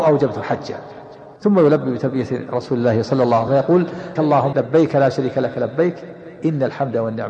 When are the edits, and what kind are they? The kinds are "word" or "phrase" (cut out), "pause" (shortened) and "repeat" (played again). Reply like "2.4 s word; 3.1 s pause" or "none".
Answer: 1.4 s pause; 3.5 s word; 4.2 s word; 4.5 s word